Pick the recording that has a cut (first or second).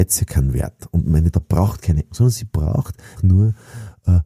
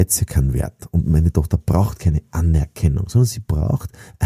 first